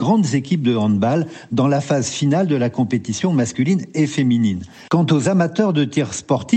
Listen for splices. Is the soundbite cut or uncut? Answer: uncut